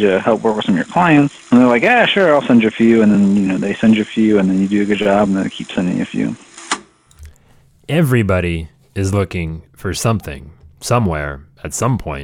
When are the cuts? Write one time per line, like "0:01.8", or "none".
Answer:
none